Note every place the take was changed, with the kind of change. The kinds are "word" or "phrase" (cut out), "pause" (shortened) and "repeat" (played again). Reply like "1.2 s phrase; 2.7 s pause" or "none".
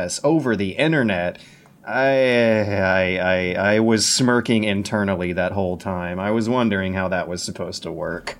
none